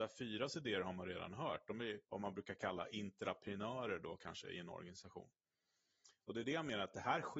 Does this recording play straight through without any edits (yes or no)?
no